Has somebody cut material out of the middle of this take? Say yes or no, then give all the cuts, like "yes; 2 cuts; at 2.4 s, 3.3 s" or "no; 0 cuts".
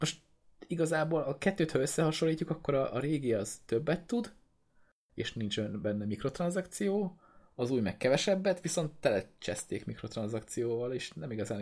no; 0 cuts